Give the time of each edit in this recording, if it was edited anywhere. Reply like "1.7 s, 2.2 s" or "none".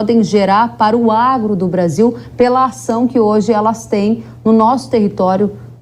none